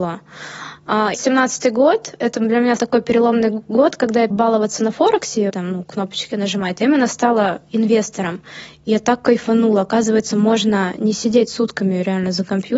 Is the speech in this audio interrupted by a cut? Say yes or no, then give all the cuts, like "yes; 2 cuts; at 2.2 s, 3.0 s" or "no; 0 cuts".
yes; 4 cuts; at 1.1 s, 2.8 s, 4.3 s, 5.5 s